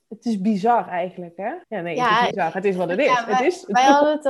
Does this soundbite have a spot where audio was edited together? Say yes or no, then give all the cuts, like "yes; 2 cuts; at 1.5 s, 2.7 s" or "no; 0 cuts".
yes; 2 cuts; at 1.6 s, 2.3 s